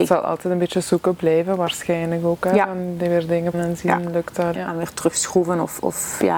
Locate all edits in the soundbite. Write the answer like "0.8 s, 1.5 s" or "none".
3.5 s, 4.5 s

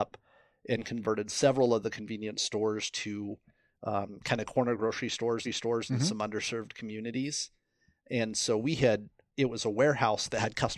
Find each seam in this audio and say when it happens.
5.4 s

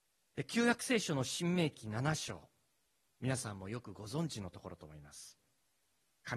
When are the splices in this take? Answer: none

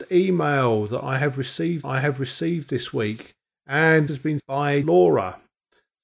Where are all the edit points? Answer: 1.8 s, 4.1 s, 4.4 s, 4.8 s

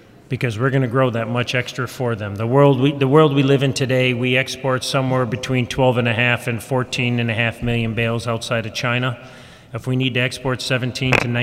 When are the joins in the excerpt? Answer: none

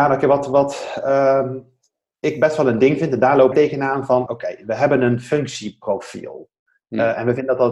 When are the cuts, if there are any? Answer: 3.5 s, 4.3 s

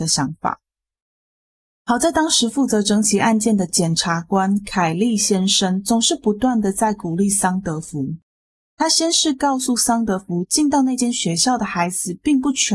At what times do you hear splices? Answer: none

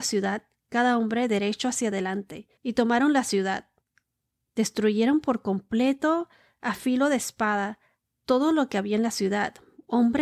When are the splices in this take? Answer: 2.6 s

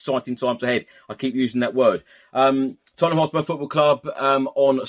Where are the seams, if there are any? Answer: none

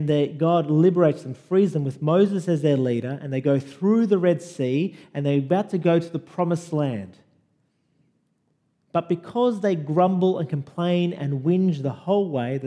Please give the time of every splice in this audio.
none

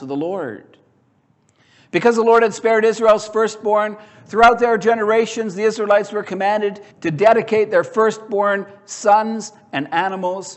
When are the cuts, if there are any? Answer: 6.9 s

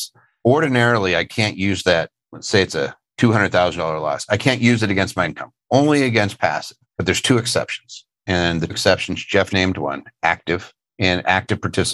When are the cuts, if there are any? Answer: 5.2 s, 8.7 s, 9.5 s

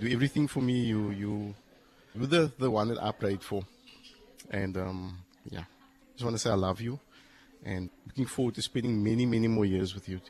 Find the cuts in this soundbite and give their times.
2.1 s, 7.9 s

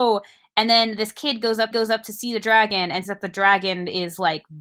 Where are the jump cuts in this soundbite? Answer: 1.7 s, 3.1 s

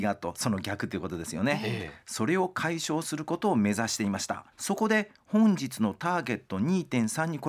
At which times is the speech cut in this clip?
4.5 s

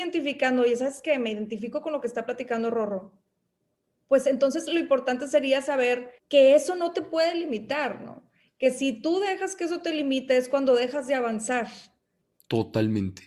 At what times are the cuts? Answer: 6.2 s

